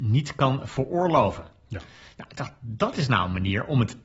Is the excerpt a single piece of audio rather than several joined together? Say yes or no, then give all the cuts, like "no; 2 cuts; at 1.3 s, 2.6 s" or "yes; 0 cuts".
yes; 0 cuts